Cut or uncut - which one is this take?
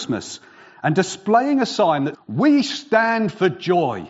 cut